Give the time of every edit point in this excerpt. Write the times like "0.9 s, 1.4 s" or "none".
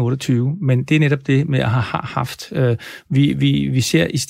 none